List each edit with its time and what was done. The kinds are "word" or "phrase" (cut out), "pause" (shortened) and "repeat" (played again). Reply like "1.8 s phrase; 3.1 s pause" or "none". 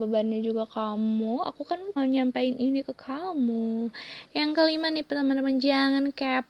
2.0 s word